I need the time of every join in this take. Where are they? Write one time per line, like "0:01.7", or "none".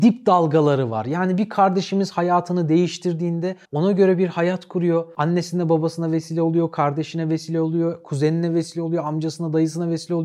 0:03.6